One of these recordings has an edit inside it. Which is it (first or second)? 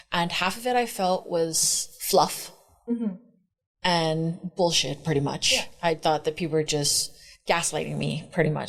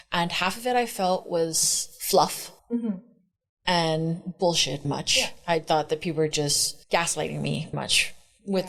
second